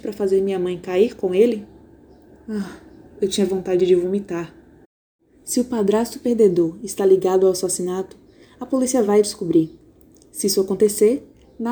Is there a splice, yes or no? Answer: no